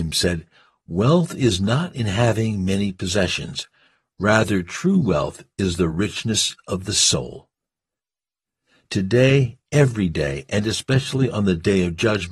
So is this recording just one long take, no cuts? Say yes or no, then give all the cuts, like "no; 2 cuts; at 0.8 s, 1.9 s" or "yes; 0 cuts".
yes; 0 cuts